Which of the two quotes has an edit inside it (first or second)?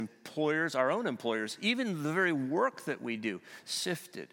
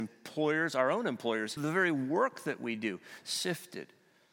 second